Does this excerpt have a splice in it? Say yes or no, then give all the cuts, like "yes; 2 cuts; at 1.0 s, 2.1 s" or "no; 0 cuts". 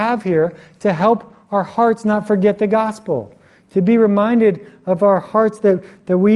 no; 0 cuts